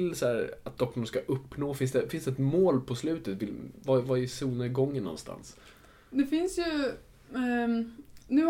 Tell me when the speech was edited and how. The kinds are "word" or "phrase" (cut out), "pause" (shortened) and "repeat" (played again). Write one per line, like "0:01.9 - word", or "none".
none